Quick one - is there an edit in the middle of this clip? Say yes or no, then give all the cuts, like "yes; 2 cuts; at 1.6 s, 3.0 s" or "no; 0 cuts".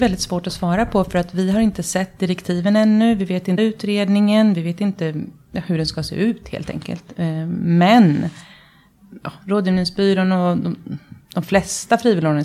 yes; 1 cut; at 3.6 s